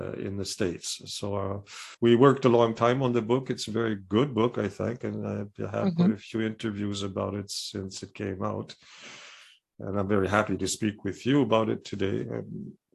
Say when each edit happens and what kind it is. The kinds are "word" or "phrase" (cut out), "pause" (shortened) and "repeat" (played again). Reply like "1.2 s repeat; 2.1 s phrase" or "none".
1.9 s pause

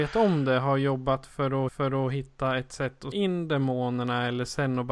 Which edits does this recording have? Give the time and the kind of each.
1.7 s repeat; 3.1 s word

